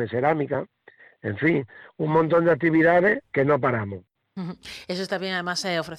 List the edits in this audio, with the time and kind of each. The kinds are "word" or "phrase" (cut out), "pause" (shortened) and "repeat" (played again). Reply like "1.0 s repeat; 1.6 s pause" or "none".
3.3 s pause

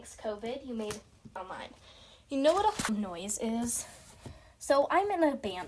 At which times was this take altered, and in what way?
1.4 s phrase; 2.9 s word

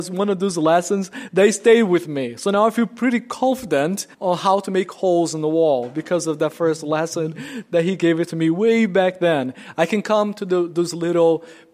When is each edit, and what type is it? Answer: 4.1 s pause

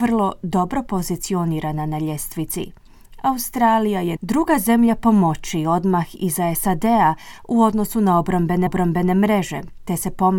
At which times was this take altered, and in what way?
4.2 s word; 8.7 s repeat

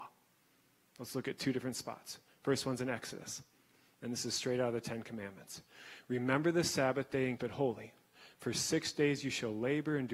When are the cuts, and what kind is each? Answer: 7.4 s word

